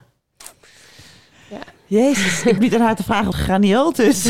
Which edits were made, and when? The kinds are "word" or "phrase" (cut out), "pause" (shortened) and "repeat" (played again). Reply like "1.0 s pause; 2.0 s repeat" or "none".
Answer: 2.6 s word; 3.3 s phrase